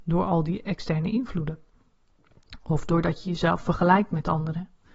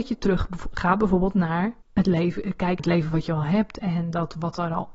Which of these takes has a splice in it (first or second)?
second